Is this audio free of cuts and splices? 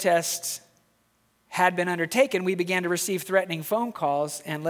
yes; 0 cuts

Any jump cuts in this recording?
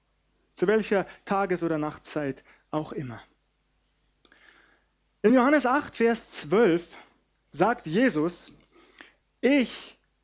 no; 0 cuts

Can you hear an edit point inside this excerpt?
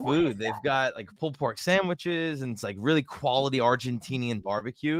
no; 0 cuts

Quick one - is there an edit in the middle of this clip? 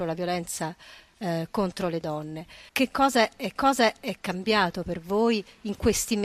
yes; 2 cuts; at 2.7 s, 3.6 s

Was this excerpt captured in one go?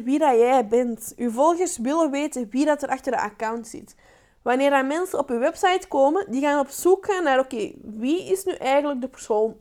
yes; 0 cuts

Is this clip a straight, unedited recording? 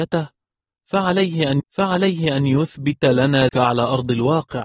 no; 2 cuts; at 1.6 s, 3.5 s

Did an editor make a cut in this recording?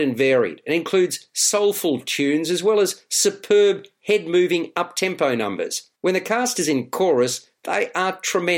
yes; 1 cut; at 6.0 s

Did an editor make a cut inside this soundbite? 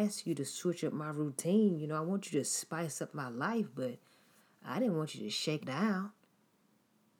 yes; 1 cut; at 5.6 s

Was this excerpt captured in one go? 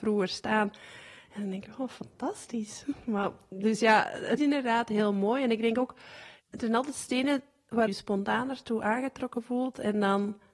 no; 3 cuts; at 4.4 s, 6.4 s, 7.9 s

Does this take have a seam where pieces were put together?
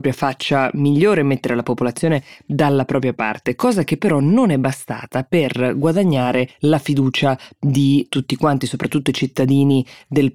no; 0 cuts

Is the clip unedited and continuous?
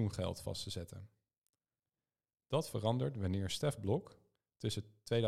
yes; 0 cuts

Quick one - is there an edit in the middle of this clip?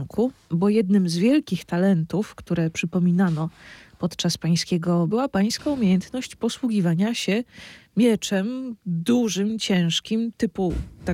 yes; 1 cut; at 5.1 s

